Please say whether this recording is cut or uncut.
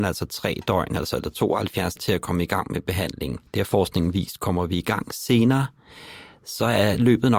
cut